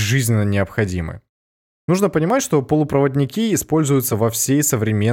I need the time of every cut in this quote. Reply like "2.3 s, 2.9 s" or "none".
none